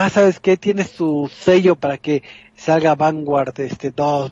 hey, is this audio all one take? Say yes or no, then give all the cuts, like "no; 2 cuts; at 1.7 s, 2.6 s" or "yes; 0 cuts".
no; 1 cut; at 1.8 s